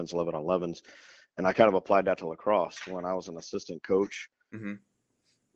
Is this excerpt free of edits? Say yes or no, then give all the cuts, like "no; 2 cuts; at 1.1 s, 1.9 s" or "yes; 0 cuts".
yes; 0 cuts